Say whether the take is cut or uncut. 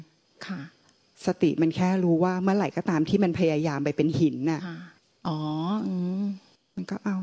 cut